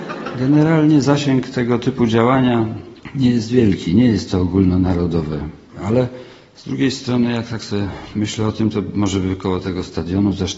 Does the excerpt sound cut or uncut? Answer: uncut